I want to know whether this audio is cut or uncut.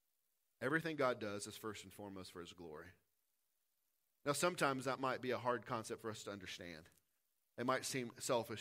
uncut